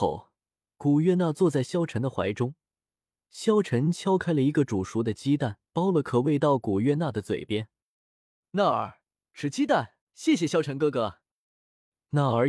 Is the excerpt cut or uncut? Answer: cut